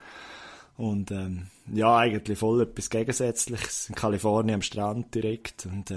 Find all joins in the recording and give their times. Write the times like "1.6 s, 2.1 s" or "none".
none